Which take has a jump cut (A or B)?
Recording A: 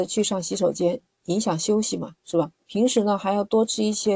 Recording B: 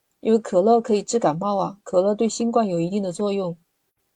A